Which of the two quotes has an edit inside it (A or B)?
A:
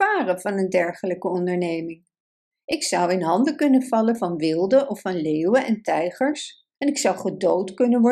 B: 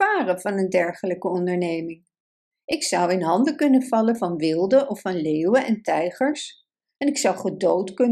A